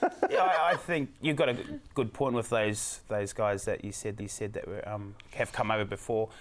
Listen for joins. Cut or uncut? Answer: cut